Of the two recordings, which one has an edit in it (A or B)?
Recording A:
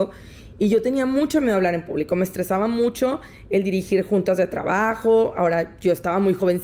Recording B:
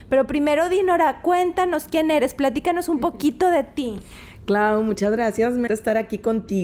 B